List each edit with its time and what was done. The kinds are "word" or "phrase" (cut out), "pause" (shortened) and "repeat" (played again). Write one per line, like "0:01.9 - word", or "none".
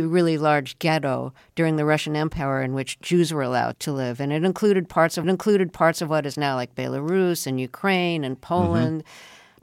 0:05.2 - repeat